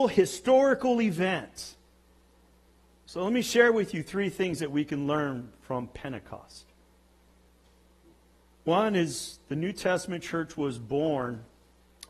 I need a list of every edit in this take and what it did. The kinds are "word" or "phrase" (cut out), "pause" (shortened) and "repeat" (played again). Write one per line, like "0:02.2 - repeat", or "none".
none